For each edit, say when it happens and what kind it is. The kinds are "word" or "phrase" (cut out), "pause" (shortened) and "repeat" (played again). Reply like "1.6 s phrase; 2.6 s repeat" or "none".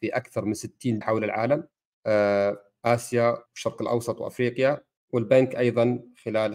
1.0 s word; 1.9 s pause; 3.5 s pause; 5.0 s pause

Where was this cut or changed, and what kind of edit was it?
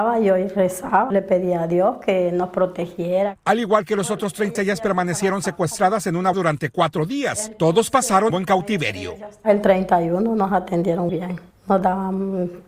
1.1 s word; 4.6 s word; 6.3 s word; 8.3 s phrase; 11.1 s word; 11.5 s pause

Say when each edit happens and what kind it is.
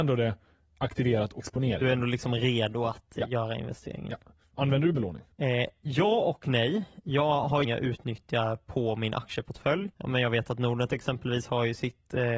1.4 s phrase; 5.3 s pause; 7.6 s phrase; 9.9 s pause

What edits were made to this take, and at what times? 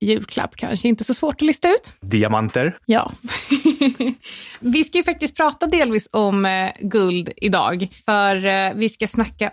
none

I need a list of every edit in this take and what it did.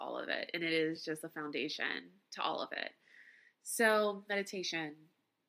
none

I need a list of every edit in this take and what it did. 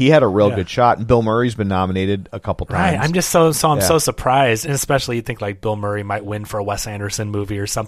none

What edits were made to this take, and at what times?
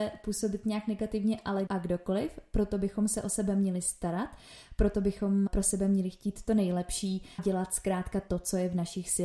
1.7 s word; 5.5 s word; 7.4 s word

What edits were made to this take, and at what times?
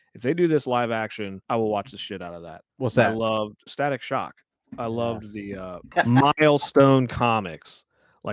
2.7 s pause; 3.7 s word

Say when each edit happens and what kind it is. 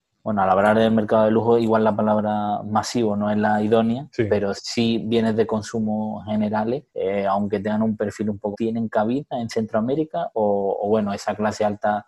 6.9 s pause; 8.5 s phrase

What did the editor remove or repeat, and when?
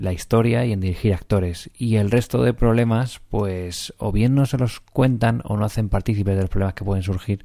none

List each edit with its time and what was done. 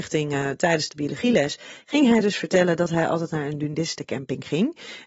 none

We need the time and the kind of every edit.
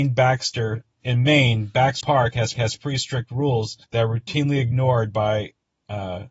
2.0 s word; 2.5 s repeat; 3.8 s pause

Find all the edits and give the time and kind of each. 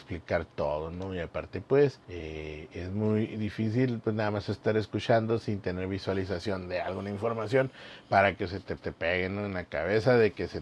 2.0 s pause; 8.8 s repeat

